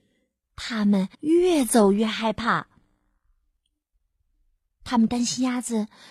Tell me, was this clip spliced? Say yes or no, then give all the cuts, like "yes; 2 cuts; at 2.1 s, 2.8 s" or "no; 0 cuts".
yes; 1 cut; at 1.1 s